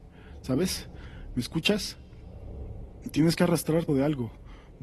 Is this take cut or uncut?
cut